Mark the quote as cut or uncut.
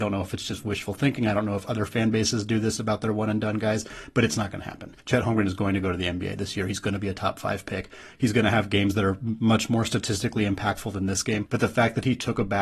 cut